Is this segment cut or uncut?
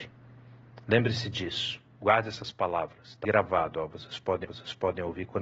cut